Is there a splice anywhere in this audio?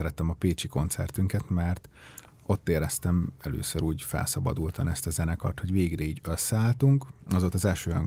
no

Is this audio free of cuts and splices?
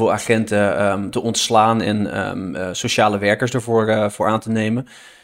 yes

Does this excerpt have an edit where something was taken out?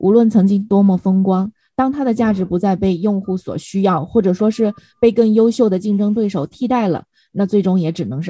no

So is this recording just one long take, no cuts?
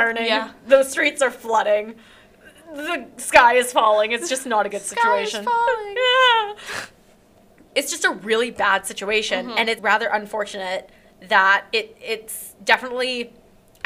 no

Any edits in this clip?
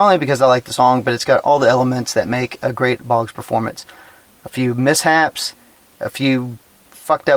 no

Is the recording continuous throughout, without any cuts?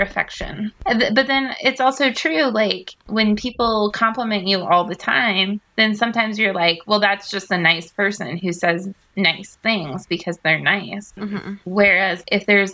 yes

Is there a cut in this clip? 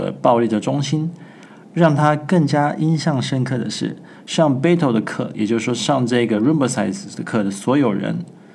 no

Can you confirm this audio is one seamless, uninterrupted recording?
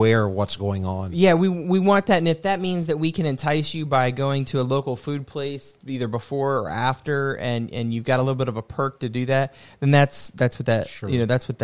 yes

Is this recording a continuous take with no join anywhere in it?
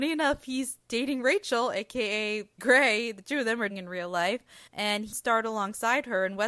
no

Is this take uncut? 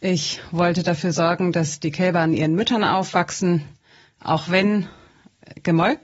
yes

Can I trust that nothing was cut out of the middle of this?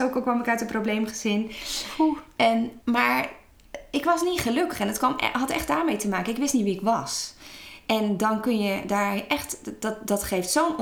no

